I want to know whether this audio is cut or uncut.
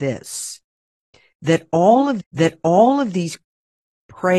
cut